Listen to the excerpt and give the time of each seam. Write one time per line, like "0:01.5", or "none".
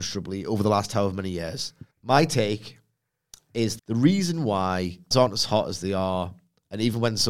0:01.9
0:03.8
0:05.1